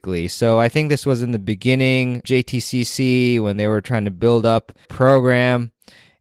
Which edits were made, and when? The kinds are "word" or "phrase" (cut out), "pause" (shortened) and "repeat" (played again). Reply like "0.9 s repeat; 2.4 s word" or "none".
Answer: 2.2 s word; 4.9 s word